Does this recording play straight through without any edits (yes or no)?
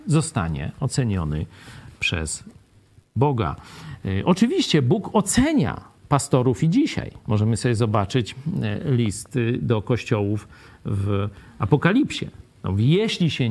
yes